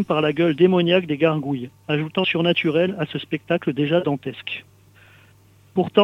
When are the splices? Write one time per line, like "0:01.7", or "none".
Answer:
0:02.2

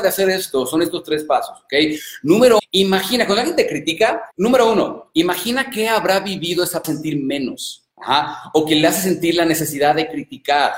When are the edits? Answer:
0:02.6
0:04.3
0:06.8
0:07.9

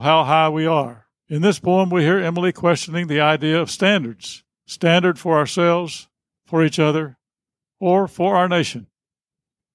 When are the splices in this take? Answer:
0:01.2
0:04.5

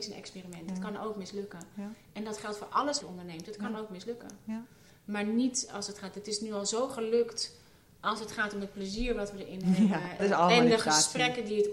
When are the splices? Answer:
0:03.0
0:10.2

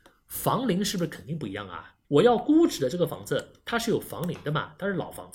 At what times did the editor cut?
0:02.0

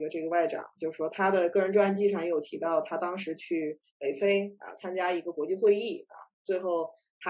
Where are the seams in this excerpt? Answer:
0:03.9

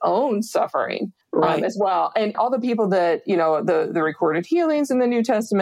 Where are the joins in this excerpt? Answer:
0:01.2
0:02.3

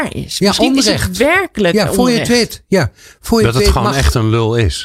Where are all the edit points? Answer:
none

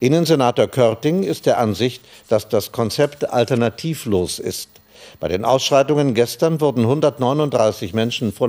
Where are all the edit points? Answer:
none

